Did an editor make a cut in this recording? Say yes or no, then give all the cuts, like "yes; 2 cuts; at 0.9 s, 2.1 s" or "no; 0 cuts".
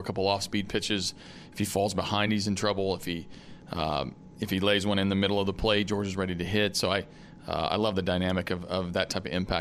no; 0 cuts